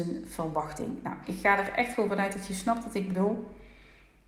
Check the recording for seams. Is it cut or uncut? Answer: uncut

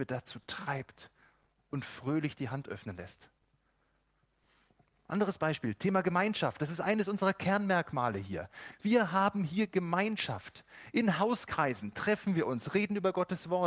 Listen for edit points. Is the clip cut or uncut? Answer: uncut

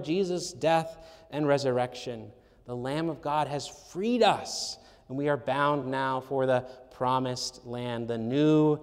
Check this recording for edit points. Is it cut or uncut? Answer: uncut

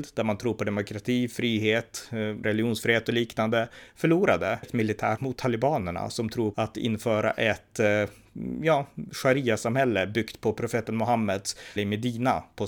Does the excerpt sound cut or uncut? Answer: cut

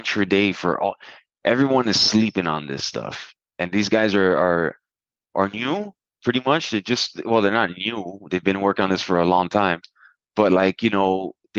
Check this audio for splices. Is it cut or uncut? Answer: uncut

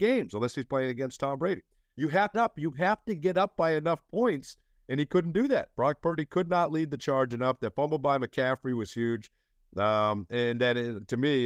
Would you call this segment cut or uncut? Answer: cut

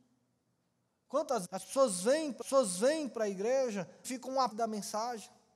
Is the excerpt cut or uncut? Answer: cut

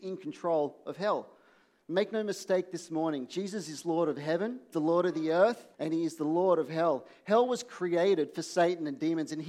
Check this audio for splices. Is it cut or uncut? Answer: cut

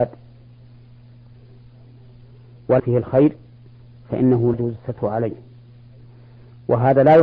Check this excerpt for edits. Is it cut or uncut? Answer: cut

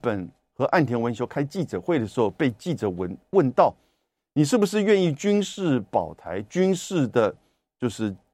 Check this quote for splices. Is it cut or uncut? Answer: uncut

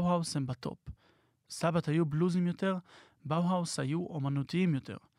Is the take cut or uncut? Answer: uncut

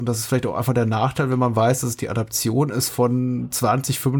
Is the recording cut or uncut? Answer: uncut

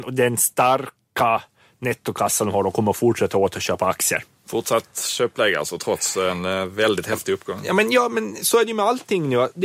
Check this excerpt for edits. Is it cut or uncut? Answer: uncut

